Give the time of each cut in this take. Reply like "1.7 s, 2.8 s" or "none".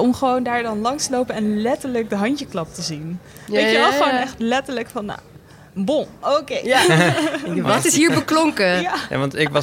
none